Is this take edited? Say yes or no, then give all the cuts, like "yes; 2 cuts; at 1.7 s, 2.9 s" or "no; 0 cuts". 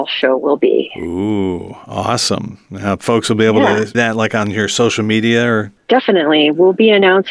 yes; 1 cut; at 3.9 s